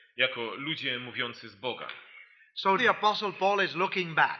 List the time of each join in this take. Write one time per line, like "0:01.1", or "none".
0:02.8